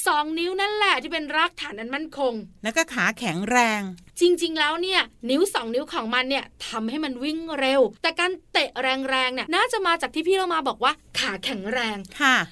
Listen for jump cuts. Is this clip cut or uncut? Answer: cut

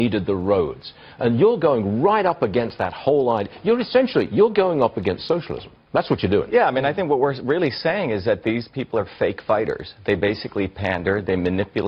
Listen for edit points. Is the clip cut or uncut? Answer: uncut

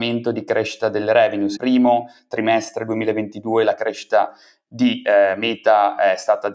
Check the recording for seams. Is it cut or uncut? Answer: cut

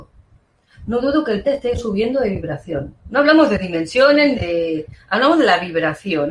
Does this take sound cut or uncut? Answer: cut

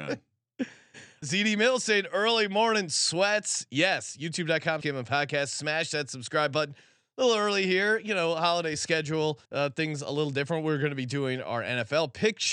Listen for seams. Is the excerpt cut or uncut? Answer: cut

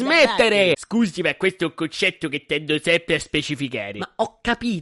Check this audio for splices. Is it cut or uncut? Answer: uncut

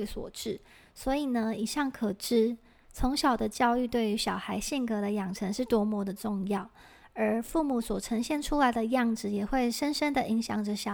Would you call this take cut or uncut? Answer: uncut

